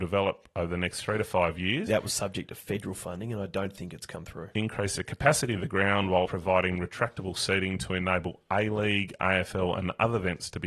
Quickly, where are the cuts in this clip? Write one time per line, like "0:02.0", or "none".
0:01.9
0:06.2